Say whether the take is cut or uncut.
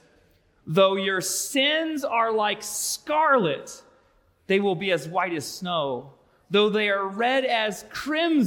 uncut